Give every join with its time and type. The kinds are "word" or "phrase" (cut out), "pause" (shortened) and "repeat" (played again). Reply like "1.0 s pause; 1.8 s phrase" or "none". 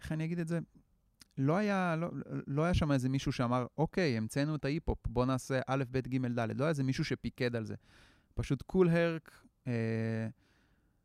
none